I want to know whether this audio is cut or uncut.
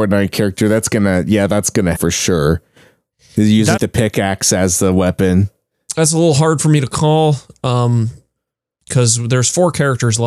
cut